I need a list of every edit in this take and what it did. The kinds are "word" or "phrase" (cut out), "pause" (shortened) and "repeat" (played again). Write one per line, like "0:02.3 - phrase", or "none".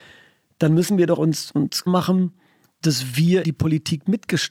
0:01.2 - word
0:01.9 - word
0:03.4 - word